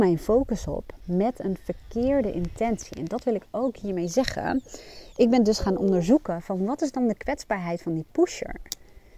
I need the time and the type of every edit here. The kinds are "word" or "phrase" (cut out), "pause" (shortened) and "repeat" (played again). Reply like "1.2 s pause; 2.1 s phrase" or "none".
none

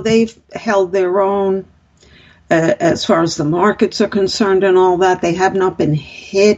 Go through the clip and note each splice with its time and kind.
none

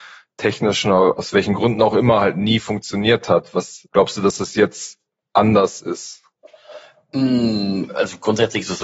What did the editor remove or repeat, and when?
3.9 s word

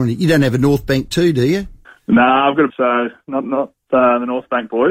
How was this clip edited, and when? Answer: 1.8 s pause; 2.7 s phrase

